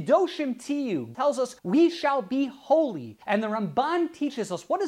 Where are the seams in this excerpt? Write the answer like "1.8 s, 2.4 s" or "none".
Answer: 1.1 s, 1.6 s, 3.2 s

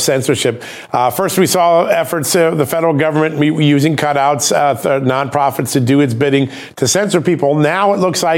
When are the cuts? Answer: none

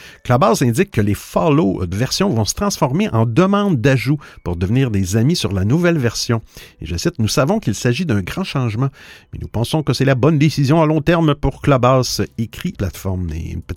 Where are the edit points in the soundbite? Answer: 1.9 s, 12.7 s

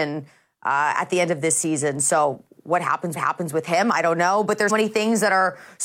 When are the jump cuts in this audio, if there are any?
3.2 s, 4.7 s

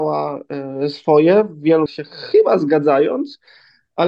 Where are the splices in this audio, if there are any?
1.9 s

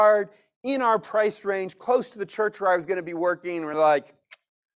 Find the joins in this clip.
none

